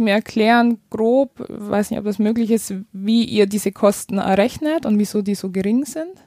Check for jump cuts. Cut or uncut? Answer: uncut